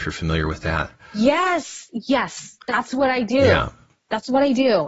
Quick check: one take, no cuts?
yes; 0 cuts

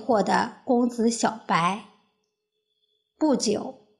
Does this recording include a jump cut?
no; 0 cuts

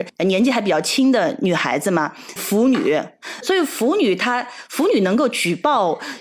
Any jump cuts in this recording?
yes; 2 cuts; at 2.4 s, 3.4 s

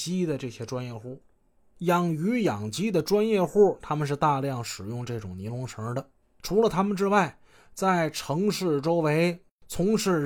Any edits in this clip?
no; 0 cuts

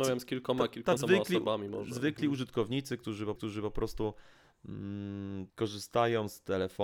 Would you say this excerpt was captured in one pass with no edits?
no; 3 cuts; at 1.0 s, 3.4 s, 5.5 s

